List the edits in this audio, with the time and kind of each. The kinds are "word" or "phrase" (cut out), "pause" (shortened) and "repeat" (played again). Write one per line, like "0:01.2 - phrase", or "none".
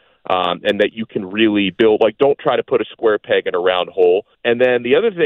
0:04.3 - pause